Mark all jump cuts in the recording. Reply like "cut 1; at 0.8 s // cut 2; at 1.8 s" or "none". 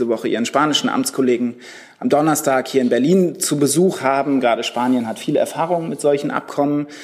none